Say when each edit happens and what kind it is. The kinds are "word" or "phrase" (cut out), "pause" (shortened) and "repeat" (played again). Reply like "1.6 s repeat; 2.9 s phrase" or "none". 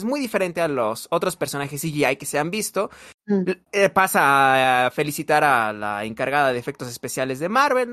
3.6 s pause